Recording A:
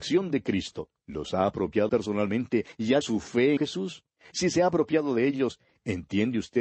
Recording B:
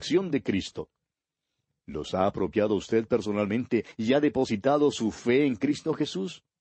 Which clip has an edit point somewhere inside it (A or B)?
A